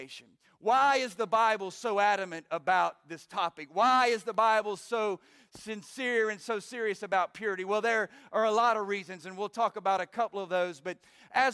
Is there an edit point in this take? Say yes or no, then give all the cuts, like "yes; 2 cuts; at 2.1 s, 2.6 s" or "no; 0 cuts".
no; 0 cuts